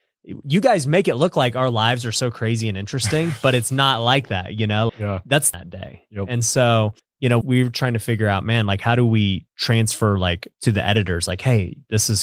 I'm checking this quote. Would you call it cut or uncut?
cut